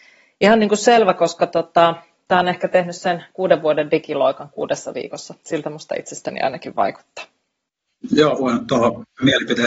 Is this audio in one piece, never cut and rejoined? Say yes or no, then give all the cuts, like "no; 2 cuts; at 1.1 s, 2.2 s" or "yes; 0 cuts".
yes; 0 cuts